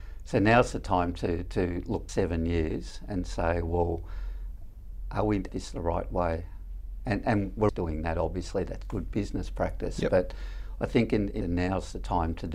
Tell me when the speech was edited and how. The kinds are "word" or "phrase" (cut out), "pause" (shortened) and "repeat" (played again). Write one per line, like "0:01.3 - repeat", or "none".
0:02.1 - phrase
0:05.5 - phrase
0:07.7 - word
0:08.8 - word
0:11.4 - phrase